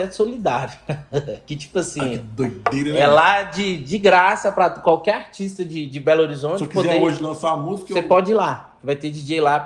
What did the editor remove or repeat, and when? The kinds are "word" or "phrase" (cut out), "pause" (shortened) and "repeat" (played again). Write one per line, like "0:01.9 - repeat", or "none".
none